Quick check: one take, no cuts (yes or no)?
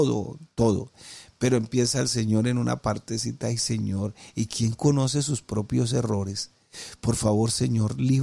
yes